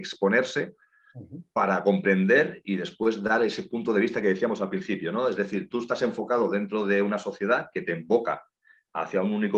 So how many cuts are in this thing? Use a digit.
0